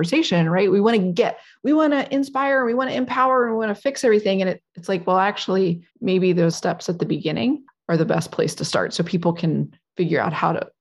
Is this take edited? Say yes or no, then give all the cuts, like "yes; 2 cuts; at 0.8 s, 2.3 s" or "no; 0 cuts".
yes; 3 cuts; at 4.7 s, 5.9 s, 6.5 s